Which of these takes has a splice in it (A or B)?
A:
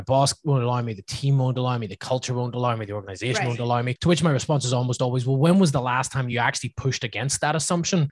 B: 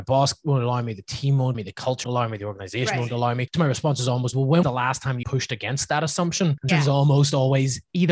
B